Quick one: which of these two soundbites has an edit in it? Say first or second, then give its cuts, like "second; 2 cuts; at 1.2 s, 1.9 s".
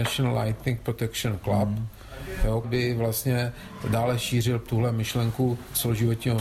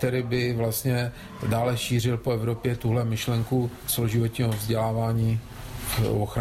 first; 2 cuts; at 2.6 s, 4.7 s